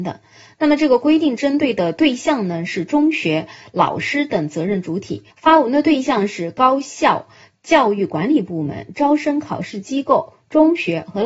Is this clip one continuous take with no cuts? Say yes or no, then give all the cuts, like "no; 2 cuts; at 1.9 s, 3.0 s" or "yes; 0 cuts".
no; 1 cut; at 5.3 s